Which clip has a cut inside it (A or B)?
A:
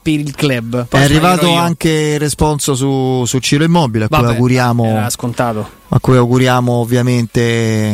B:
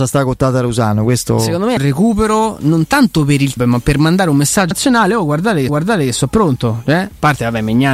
B